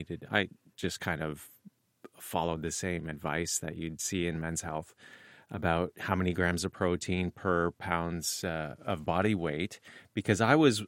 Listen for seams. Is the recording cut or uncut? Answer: uncut